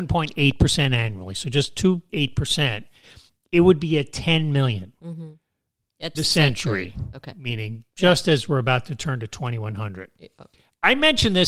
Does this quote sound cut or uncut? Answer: cut